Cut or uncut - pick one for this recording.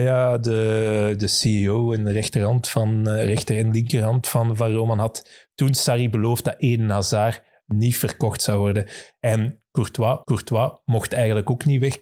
cut